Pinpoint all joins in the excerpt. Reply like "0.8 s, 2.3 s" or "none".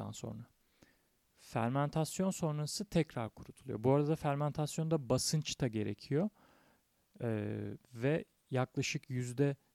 7.8 s